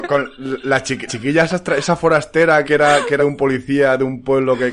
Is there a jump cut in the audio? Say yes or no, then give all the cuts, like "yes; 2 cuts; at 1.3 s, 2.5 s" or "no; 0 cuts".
yes; 3 cuts; at 1.1 s, 2.6 s, 3.2 s